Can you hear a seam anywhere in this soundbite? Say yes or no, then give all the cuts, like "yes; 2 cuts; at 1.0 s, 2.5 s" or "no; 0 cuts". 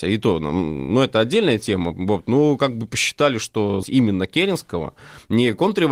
yes; 1 cut; at 3.8 s